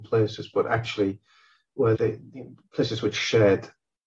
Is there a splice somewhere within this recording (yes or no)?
yes